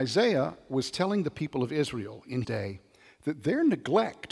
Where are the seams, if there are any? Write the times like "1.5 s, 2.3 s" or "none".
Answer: 2.4 s